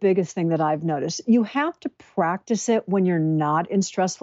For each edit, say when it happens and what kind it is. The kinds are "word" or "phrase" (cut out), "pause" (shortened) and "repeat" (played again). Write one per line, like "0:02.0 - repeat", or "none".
none